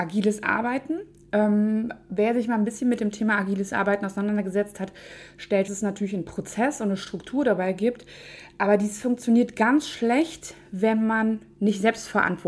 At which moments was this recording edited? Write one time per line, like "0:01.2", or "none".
0:05.7